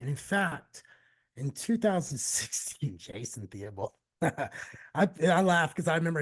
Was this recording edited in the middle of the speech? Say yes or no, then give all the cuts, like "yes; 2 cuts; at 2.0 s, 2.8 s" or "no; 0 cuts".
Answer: no; 0 cuts